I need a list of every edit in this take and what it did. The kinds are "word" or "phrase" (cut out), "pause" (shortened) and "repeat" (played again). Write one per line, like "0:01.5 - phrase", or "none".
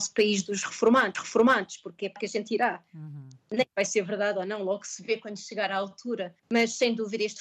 0:01.1 - repeat
0:02.2 - word
0:03.7 - pause
0:06.4 - pause